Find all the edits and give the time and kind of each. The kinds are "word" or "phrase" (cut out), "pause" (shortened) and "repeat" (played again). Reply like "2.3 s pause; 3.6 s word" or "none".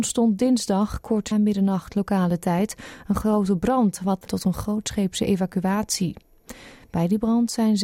1.3 s word; 4.3 s word